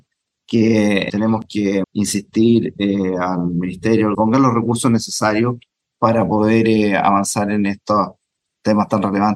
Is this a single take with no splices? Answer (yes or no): no